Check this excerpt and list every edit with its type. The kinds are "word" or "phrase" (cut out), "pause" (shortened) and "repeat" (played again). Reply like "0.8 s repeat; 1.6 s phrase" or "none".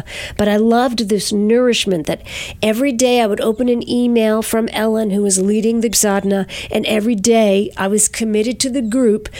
5.9 s word